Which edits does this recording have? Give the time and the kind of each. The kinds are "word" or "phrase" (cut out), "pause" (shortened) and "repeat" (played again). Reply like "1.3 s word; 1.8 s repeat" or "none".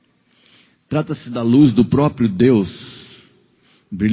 none